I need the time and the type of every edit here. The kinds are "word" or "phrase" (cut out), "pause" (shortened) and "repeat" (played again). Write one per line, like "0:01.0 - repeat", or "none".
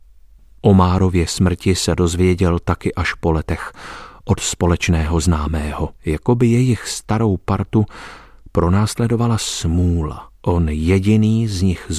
0:06.0 - pause
0:10.4 - pause